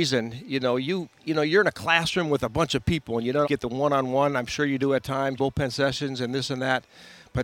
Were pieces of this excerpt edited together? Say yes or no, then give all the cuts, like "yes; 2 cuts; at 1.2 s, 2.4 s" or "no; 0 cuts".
yes; 3 cuts; at 1.2 s, 3.4 s, 5.4 s